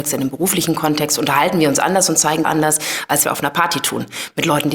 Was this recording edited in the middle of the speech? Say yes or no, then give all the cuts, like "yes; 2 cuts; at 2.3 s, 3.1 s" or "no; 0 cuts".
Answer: yes; 2 cuts; at 2.4 s, 3.2 s